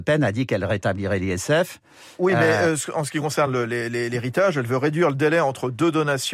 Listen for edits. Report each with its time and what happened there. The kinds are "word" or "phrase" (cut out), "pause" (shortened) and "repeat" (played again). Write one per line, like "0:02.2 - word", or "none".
none